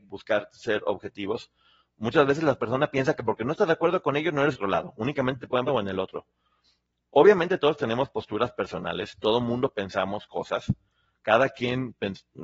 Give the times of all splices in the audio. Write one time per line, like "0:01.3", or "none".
0:04.5
0:05.7